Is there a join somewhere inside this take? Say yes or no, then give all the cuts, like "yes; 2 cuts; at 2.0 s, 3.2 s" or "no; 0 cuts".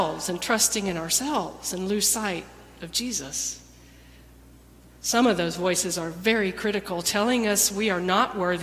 no; 0 cuts